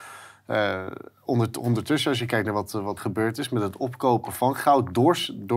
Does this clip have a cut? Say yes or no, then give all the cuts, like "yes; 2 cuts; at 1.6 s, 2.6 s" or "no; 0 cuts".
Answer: yes; 1 cut; at 3.0 s